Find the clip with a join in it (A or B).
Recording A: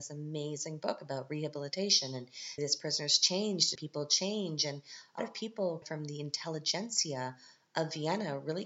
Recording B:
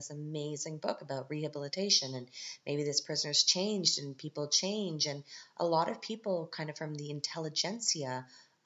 A